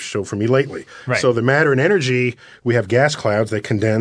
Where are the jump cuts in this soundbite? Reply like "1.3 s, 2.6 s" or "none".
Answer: none